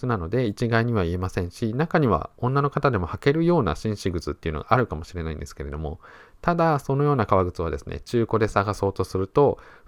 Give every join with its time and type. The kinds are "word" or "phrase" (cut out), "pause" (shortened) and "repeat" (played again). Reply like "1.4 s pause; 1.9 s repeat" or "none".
none

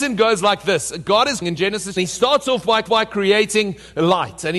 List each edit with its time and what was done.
1.4 s word; 2.0 s phrase; 2.9 s repeat

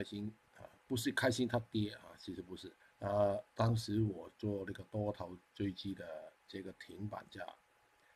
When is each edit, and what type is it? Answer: 2.8 s pause; 3.5 s pause; 6.4 s pause

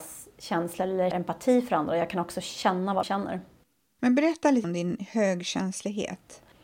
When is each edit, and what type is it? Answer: 1.1 s word; 3.0 s word; 4.6 s word

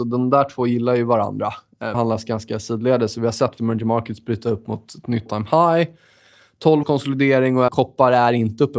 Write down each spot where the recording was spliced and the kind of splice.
1.9 s word; 3.6 s word; 5.3 s word; 6.8 s word; 7.7 s word

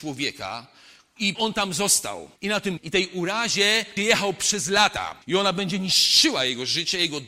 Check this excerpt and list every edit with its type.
1.3 s phrase; 2.4 s pause; 2.8 s phrase; 4.0 s word; 5.2 s pause

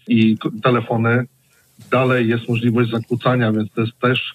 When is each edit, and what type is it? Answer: none

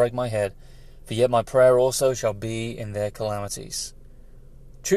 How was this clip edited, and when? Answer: none

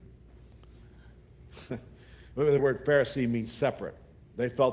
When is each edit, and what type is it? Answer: 2.6 s word

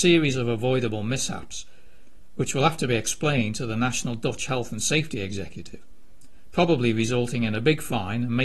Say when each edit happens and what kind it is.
none

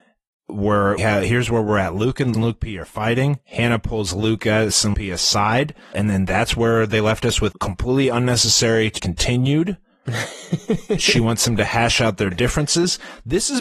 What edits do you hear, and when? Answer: 1.0 s word; 2.3 s word; 4.9 s word; 5.9 s word; 7.5 s word; 9.0 s word

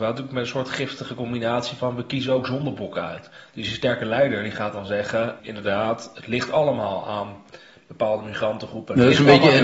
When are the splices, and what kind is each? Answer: 5.4 s word

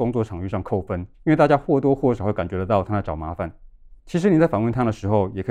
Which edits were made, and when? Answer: 1.1 s pause; 4.0 s pause

